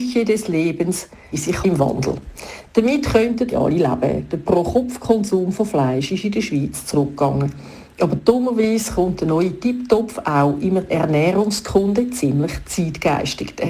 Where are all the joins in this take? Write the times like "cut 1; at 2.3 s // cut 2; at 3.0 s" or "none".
cut 1; at 1.3 s // cut 2; at 1.6 s // cut 3; at 3.5 s // cut 4; at 10.9 s